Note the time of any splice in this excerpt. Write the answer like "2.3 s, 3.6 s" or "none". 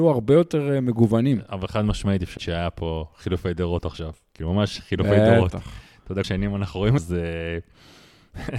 2.4 s, 6.2 s, 7.0 s